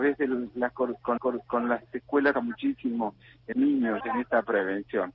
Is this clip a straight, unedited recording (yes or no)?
no